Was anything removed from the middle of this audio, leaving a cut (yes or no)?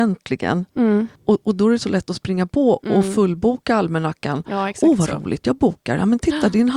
yes